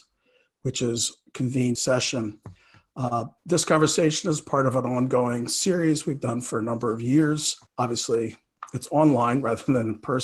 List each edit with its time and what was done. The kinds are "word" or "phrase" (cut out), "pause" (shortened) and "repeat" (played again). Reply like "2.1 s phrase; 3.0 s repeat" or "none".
1.8 s phrase; 3.4 s pause; 7.7 s pause